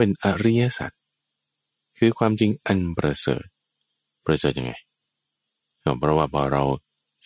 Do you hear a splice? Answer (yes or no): no